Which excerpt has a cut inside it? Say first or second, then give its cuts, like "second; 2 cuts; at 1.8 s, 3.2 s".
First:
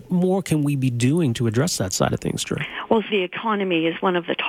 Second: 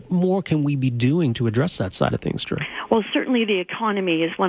first; 1 cut; at 3.1 s